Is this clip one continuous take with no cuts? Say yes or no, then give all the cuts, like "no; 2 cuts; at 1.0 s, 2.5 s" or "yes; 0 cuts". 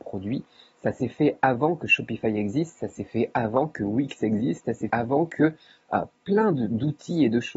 no; 1 cut; at 4.9 s